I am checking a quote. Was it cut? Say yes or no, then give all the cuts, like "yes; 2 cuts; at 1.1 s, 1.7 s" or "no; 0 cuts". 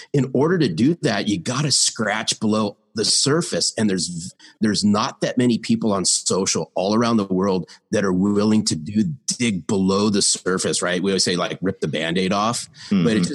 no; 0 cuts